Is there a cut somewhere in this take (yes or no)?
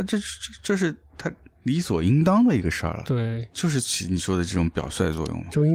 no